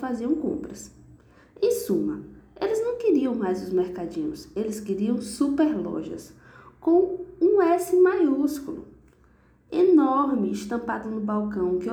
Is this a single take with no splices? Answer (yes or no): yes